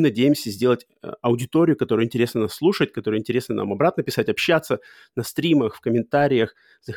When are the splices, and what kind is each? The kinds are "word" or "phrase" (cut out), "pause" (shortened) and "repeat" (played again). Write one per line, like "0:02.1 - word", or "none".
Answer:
none